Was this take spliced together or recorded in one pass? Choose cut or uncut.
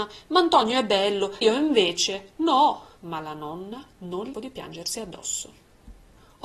cut